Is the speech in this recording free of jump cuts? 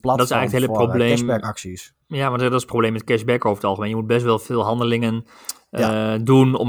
no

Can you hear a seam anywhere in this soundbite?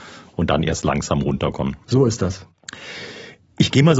yes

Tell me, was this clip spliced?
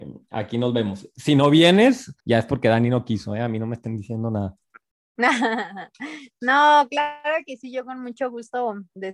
yes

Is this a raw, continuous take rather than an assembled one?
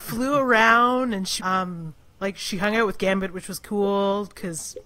no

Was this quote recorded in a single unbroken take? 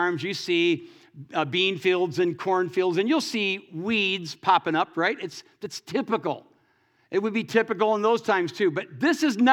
yes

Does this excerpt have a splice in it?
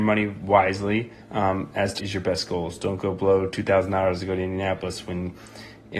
yes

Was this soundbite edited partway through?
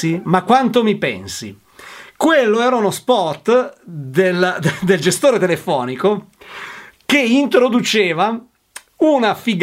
no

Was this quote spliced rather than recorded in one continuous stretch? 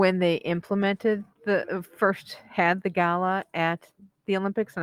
yes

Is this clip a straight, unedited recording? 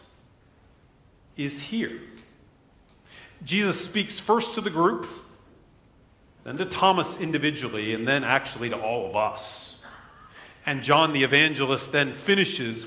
yes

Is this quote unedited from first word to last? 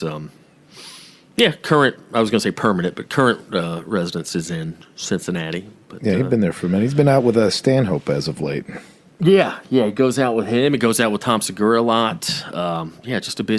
yes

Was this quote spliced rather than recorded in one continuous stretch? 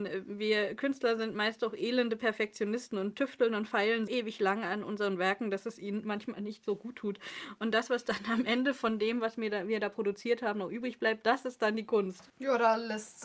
yes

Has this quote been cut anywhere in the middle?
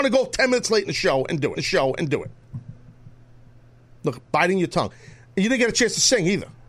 yes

